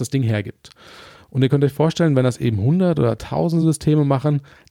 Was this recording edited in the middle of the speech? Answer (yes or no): no